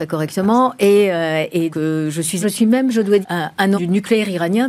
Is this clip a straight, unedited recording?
no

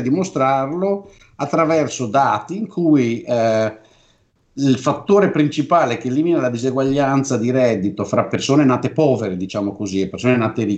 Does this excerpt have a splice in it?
no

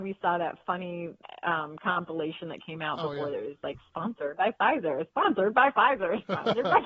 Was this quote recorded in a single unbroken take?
yes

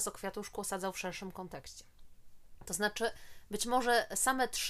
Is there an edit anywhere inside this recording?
no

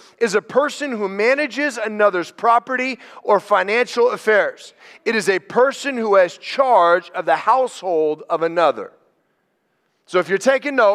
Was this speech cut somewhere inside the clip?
no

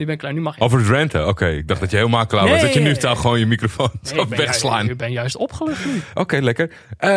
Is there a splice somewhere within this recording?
no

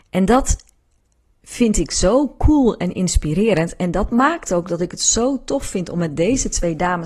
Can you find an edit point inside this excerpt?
no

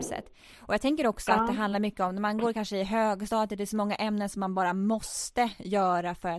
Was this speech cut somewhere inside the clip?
no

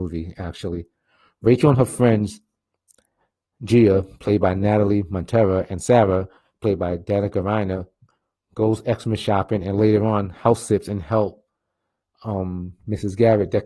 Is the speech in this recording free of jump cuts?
yes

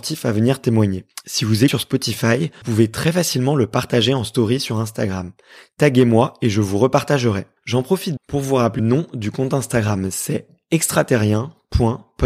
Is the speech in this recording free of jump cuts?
no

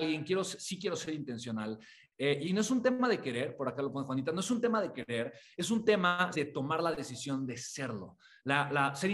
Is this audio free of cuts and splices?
no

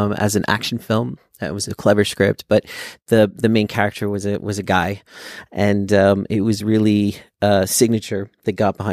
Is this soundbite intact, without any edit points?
yes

